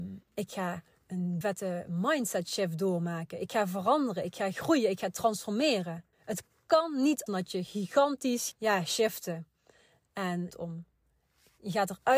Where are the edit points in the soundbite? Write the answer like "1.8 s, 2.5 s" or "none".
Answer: 1.4 s, 6.1 s, 7.3 s, 8.5 s, 10.5 s